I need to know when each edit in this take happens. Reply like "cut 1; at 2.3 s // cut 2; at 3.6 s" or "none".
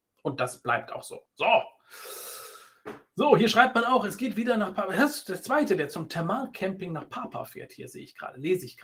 cut 1; at 1.3 s